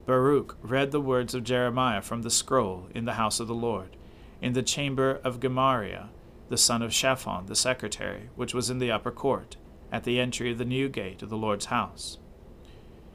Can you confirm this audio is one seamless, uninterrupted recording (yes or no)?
yes